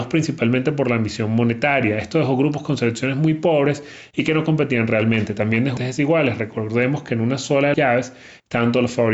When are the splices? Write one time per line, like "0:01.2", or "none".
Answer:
0:05.8
0:07.7